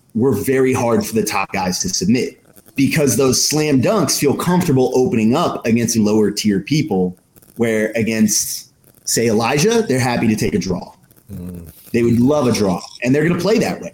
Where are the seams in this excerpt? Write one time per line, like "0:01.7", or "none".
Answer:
0:05.9